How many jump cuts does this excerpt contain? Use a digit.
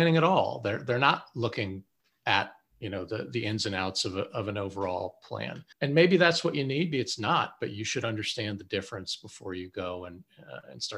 2